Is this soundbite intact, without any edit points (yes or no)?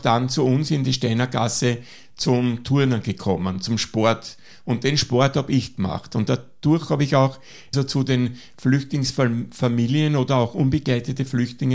no